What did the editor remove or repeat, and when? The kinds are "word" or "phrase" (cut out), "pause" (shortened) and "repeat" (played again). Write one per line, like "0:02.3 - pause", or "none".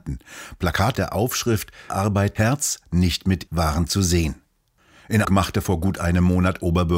0:00.9 - word
0:01.9 - word
0:02.4 - word
0:03.5 - word
0:05.2 - word

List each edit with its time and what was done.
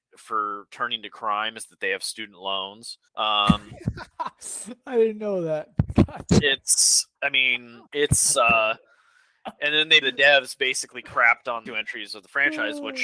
0:03.1 - pause
0:07.1 - pause
0:07.9 - pause
0:10.0 - word
0:11.7 - phrase

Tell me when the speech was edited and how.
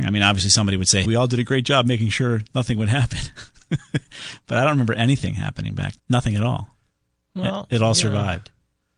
0:01.0 - word
0:06.0 - word

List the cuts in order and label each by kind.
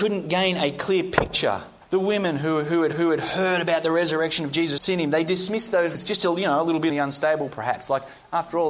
0:01.8 - pause
0:02.9 - repeat
0:04.8 - word
0:05.9 - word
0:06.9 - word

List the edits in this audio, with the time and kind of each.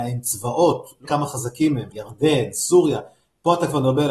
0:01.0 - word
0:01.9 - phrase

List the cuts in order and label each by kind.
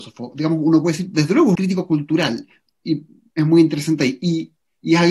0:01.6 - word
0:02.7 - pause

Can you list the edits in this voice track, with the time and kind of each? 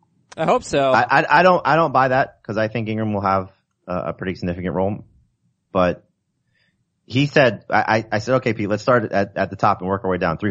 none

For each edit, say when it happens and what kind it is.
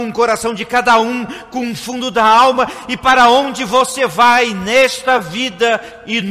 none

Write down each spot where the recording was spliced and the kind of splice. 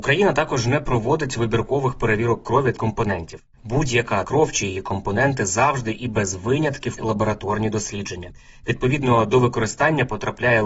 0:02.8 - word
0:04.2 - word
0:07.0 - word

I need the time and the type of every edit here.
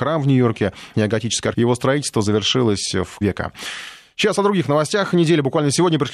0:00.9 - word
0:01.5 - word
0:03.2 - phrase

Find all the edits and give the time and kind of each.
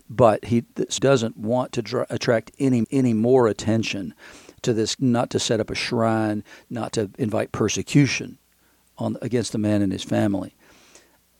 0:01.0 - word
0:02.8 - repeat
0:05.0 - word

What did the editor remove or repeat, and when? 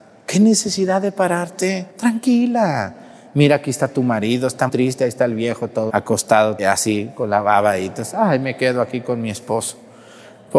0:01.9 - pause
0:04.7 - word
0:05.9 - word
0:06.6 - phrase

